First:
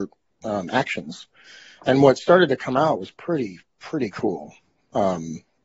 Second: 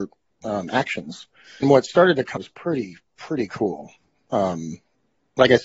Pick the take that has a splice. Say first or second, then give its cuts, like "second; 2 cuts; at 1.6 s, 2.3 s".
second; 2 cuts; at 1.6 s, 2.4 s